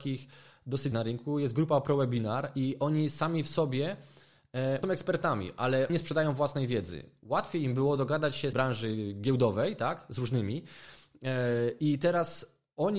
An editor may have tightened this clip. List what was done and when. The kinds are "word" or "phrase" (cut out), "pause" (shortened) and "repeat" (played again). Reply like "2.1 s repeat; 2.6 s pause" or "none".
0.9 s word; 4.8 s phrase; 5.9 s word; 8.5 s phrase

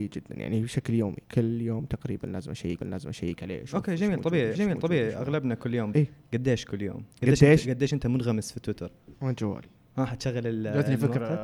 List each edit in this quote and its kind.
1.2 s pause; 2.8 s repeat; 4.5 s repeat; 5.9 s word; 7.1 s pause; 9.1 s pause

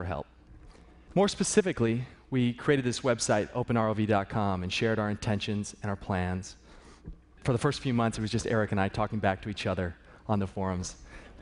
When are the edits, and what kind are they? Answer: none

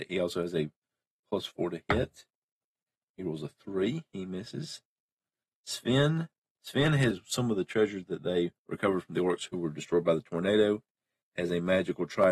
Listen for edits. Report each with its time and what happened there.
7.1 s word; 8.6 s pause

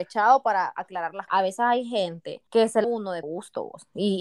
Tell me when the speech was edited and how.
1.3 s phrase; 2.5 s pause; 2.8 s phrase; 3.2 s word

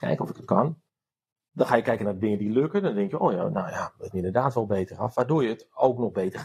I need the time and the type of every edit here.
4.1 s phrase

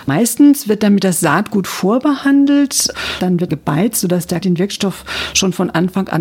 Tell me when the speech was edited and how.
3.5 s phrase; 4.4 s word

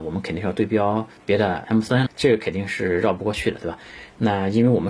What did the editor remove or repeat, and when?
2.1 s word

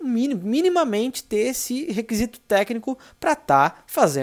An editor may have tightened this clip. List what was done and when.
none

